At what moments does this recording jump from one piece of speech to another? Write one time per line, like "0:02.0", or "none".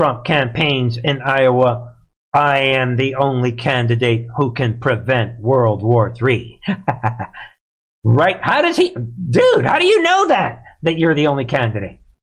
none